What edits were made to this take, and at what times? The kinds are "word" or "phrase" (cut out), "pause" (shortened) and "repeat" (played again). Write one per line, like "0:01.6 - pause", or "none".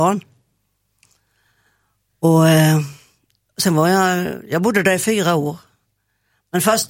none